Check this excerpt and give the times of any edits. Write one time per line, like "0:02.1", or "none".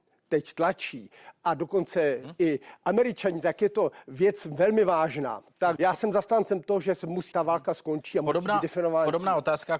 0:05.8
0:07.3